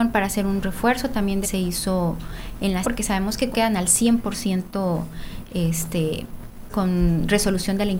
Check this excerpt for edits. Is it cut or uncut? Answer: cut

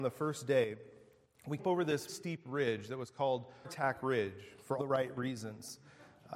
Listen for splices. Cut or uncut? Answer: cut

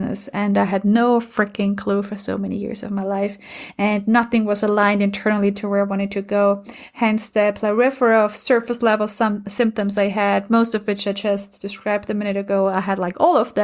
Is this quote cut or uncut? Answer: uncut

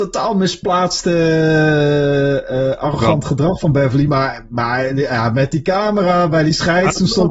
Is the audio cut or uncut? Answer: uncut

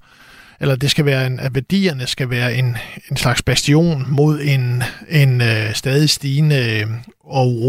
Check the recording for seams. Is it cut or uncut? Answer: uncut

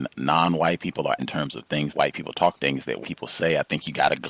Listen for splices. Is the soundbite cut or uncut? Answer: cut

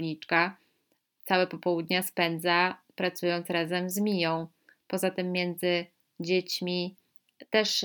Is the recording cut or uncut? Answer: uncut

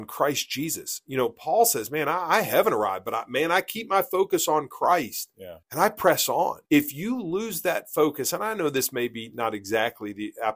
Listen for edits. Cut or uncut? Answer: cut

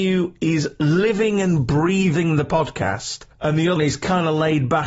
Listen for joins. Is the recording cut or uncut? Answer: cut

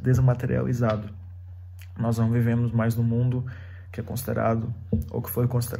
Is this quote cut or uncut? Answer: uncut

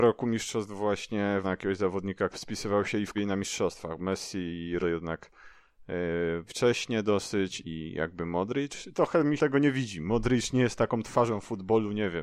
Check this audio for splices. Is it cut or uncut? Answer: cut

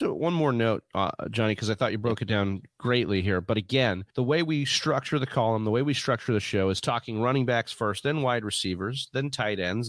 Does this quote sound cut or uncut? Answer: cut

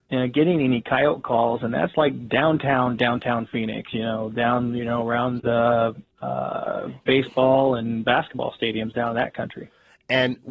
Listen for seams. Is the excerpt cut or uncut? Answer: cut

